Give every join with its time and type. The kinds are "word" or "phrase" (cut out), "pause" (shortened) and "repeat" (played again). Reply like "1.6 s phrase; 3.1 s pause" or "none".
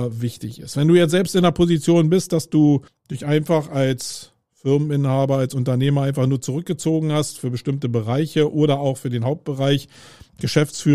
2.9 s pause